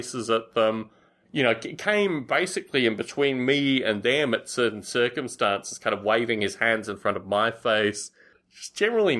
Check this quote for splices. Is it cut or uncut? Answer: uncut